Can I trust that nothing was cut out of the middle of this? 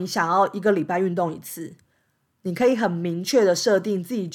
yes; 0 cuts

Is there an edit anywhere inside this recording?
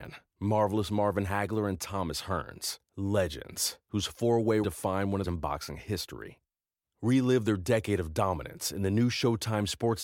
yes; 3 cuts; at 2.8 s, 4.6 s, 5.2 s

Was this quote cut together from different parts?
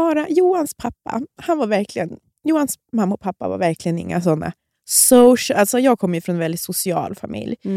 no; 0 cuts

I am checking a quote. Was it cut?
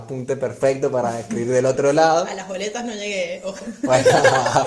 no; 0 cuts

